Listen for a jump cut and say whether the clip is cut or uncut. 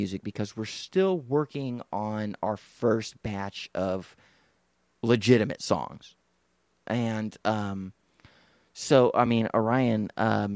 uncut